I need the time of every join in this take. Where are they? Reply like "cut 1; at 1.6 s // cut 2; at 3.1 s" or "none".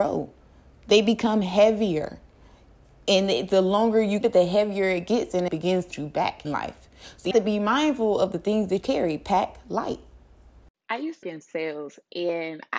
cut 1; at 4.2 s // cut 2; at 5.5 s // cut 3; at 5.9 s // cut 4; at 6.4 s // cut 5; at 7.3 s // cut 6; at 8.8 s // cut 7; at 11.2 s